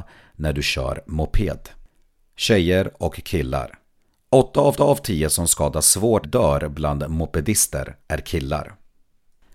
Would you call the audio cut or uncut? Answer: cut